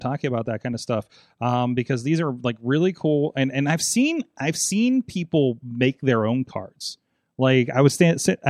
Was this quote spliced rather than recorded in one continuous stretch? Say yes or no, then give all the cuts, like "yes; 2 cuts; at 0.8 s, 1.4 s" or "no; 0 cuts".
no; 0 cuts